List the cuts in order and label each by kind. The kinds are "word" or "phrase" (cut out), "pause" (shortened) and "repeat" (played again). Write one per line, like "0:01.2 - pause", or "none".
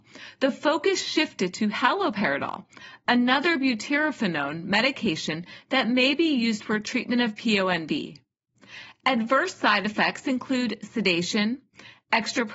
none